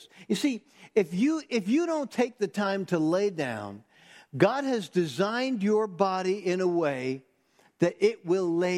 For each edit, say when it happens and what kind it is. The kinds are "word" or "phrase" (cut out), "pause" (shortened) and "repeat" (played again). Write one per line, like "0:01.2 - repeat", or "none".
none